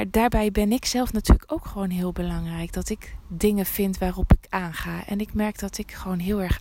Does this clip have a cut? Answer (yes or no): no